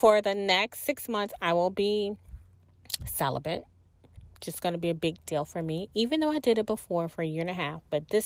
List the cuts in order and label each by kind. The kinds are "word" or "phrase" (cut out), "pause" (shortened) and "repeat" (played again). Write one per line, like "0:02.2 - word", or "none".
none